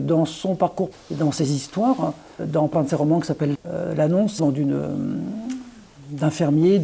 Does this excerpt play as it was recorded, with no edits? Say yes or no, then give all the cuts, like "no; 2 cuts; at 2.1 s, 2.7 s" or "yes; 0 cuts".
no; 5 cuts; at 0.9 s, 2.4 s, 2.7 s, 3.5 s, 4.4 s